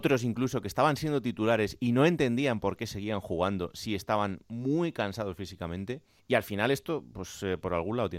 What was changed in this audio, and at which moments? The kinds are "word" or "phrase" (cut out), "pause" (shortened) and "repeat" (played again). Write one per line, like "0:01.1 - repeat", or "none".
0:06.2 - pause